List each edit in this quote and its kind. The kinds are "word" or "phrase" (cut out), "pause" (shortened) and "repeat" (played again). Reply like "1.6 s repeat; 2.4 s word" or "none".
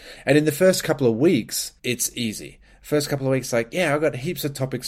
1.8 s pause